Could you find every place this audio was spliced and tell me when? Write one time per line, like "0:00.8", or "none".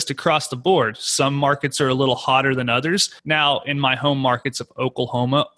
0:03.2

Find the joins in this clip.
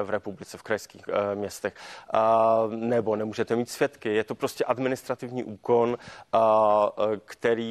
none

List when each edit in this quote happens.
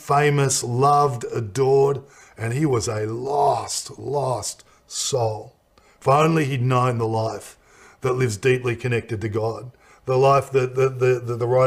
none

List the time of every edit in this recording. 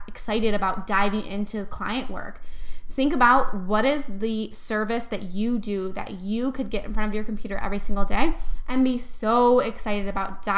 none

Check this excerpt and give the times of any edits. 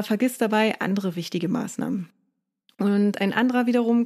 none

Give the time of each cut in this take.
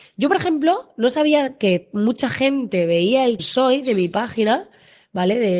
0:03.4

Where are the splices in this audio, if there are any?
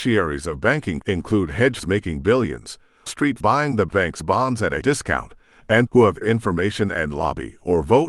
0:01.0
0:01.8
0:03.1
0:03.4
0:03.9
0:04.8
0:05.9
0:06.2

